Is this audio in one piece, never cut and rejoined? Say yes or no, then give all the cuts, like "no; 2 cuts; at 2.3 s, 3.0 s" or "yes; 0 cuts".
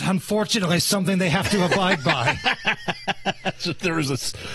yes; 0 cuts